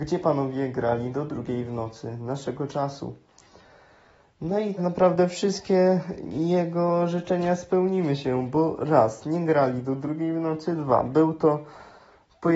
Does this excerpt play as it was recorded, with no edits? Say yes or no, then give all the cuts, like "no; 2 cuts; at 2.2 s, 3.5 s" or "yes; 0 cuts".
no; 1 cut; at 4.8 s